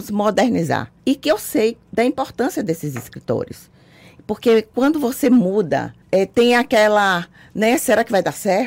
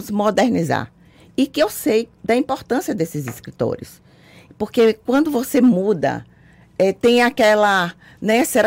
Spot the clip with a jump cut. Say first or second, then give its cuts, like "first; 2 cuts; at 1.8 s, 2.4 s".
first; 2 cuts; at 1.0 s, 6.0 s